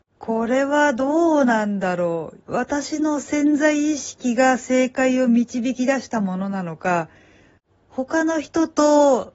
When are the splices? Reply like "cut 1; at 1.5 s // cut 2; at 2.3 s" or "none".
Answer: cut 1; at 2.4 s